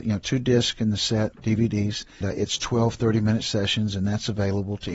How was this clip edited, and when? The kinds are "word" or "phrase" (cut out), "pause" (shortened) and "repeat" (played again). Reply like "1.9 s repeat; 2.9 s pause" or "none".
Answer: 1.3 s word; 2.2 s word